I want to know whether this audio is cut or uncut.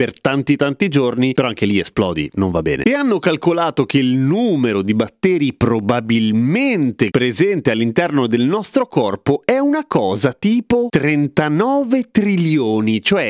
uncut